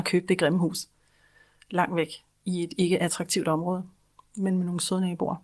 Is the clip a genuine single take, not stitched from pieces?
yes; 0 cuts

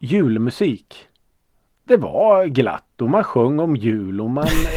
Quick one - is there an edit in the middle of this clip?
no; 0 cuts

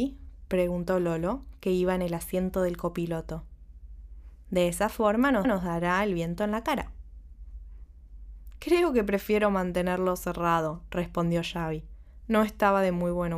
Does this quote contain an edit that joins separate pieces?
yes; 1 cut; at 5.4 s

